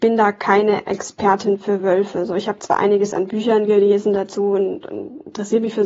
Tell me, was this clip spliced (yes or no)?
no